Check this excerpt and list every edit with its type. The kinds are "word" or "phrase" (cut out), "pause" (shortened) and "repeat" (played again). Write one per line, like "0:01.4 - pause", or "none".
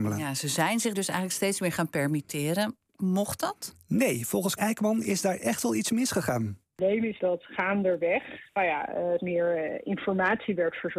0:00.9 - word
0:04.6 - word
0:07.2 - word
0:09.2 - word